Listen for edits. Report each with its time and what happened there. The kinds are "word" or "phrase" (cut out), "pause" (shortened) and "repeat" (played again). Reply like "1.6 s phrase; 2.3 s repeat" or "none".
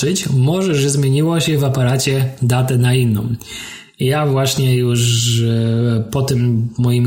none